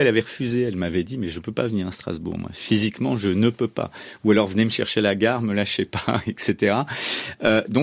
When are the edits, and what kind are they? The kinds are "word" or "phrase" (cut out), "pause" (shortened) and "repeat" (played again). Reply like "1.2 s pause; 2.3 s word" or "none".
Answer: none